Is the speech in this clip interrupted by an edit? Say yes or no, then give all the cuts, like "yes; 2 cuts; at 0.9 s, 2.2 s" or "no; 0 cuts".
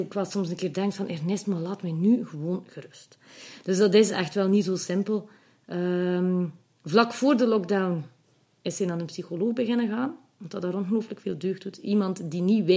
no; 0 cuts